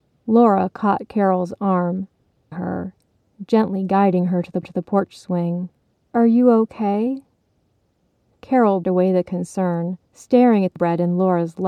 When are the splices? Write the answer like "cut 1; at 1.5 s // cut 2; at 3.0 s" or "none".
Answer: cut 1; at 2.5 s // cut 2; at 4.6 s // cut 3; at 5.8 s // cut 4; at 8.8 s // cut 5; at 10.0 s // cut 6; at 10.8 s